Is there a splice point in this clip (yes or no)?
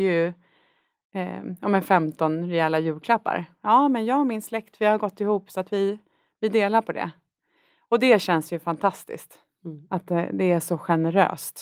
no